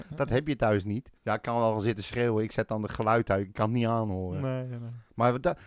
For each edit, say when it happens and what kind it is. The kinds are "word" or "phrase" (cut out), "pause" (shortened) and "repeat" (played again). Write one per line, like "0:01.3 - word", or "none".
0:01.2 - pause